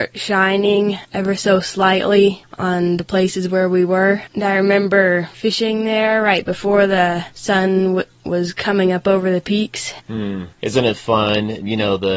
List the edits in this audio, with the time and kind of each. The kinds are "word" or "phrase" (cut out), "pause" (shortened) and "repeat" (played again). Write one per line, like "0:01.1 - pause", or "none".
none